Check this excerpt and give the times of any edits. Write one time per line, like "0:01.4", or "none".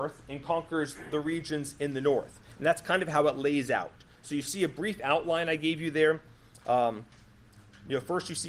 none